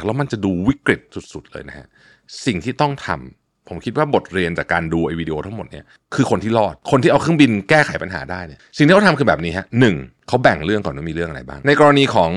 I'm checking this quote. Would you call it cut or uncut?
uncut